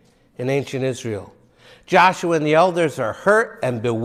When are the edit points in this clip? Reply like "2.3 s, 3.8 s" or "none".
none